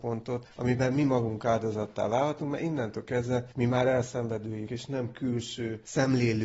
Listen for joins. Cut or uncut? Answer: cut